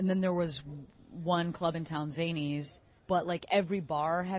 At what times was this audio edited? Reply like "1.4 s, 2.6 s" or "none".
3.0 s